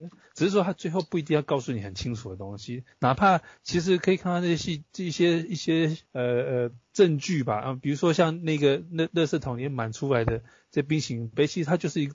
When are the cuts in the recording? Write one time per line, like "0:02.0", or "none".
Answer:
0:06.1